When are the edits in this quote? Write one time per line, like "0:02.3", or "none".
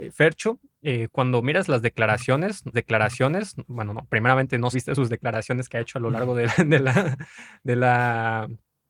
0:02.7
0:04.7